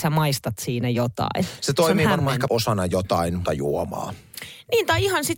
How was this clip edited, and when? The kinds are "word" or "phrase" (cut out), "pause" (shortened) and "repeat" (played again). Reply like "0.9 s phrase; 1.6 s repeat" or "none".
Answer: 2.5 s word; 3.4 s word